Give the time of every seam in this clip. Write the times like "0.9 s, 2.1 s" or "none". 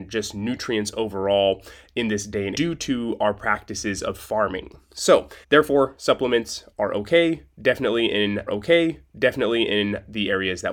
2.5 s, 5.4 s, 8.5 s